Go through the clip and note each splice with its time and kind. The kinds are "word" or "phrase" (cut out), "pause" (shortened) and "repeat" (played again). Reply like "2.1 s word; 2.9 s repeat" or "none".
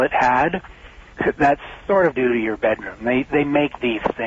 2.1 s phrase